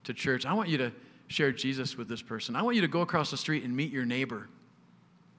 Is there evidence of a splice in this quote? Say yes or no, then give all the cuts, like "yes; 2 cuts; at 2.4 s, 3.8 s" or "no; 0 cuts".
no; 0 cuts